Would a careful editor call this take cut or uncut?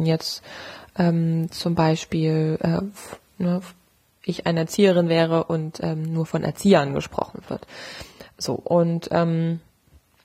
uncut